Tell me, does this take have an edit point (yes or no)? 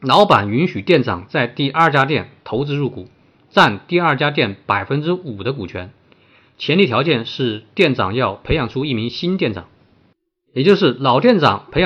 no